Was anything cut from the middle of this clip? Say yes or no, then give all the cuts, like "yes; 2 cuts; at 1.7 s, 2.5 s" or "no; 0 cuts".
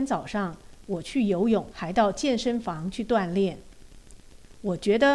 yes; 1 cut; at 1.7 s